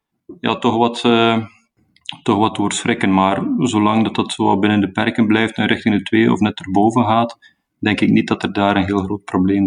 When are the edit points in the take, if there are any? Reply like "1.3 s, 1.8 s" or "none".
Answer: none